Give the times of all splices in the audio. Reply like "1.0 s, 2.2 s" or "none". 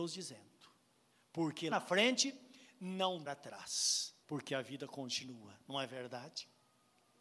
1.7 s, 3.3 s, 4.2 s